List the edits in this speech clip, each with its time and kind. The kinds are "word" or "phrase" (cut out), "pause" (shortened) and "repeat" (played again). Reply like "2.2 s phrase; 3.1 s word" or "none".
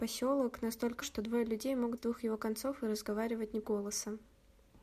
1.0 s word; 2.0 s word; 3.6 s word